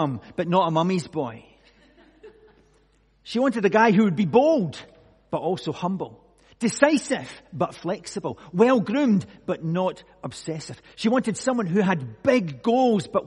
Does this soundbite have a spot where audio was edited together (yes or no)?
no